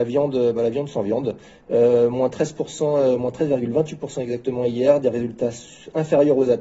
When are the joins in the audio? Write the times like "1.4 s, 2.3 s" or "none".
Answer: none